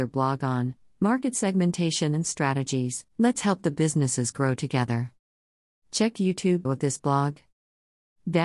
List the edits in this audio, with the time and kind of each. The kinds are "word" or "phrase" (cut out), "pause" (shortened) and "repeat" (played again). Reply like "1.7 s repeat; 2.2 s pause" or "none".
3.1 s pause; 6.6 s word